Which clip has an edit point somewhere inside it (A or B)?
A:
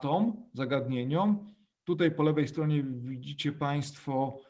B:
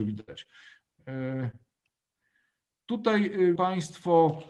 B